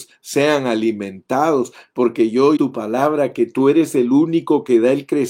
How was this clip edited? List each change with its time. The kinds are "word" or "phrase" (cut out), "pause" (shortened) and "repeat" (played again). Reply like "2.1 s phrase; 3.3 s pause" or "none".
2.6 s phrase